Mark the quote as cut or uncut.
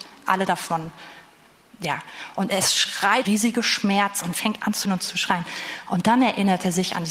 cut